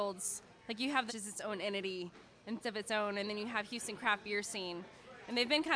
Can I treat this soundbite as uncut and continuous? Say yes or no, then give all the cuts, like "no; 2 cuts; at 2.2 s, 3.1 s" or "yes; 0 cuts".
no; 2 cuts; at 1.1 s, 2.6 s